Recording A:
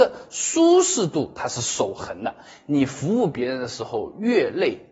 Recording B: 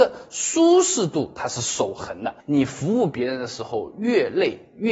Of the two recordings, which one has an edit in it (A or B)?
B